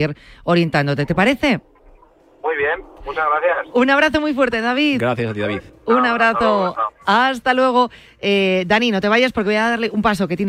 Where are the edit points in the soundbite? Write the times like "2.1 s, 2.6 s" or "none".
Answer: none